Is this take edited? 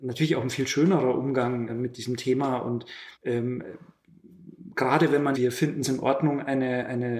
yes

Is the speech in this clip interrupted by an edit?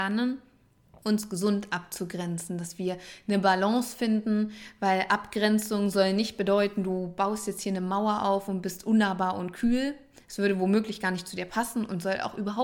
no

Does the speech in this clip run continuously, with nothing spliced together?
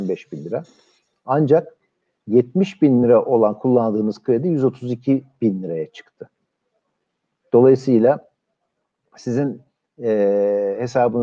yes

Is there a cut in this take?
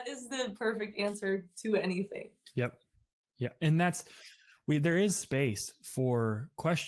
no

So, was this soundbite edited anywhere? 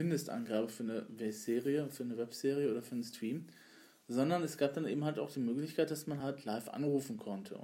no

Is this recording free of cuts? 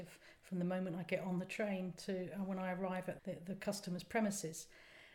no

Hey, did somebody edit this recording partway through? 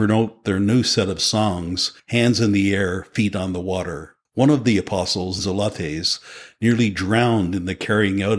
yes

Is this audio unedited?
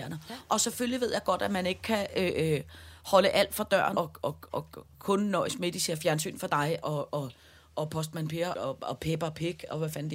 no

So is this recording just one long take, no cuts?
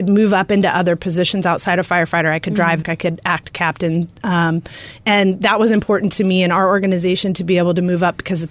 no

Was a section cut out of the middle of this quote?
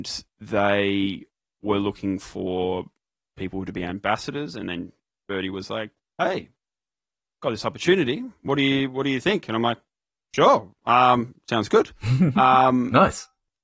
no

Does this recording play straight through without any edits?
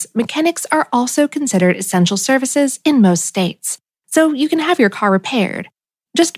yes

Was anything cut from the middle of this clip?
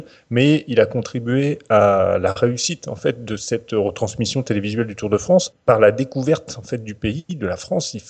no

